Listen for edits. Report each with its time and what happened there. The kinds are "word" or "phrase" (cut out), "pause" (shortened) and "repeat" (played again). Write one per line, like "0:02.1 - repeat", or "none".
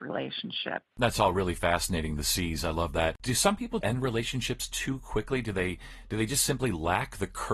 0:03.8 - word